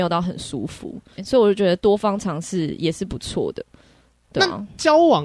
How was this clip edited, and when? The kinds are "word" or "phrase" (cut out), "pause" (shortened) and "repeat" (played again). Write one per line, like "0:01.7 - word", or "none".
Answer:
0:01.2 - word